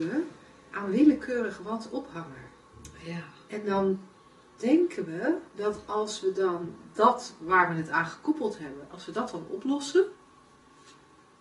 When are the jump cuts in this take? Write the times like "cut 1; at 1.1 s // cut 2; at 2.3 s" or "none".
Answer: cut 1; at 4.2 s // cut 2; at 5.5 s